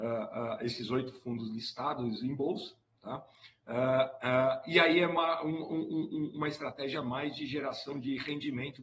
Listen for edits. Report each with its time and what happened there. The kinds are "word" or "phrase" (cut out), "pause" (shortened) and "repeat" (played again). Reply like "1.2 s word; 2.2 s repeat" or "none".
none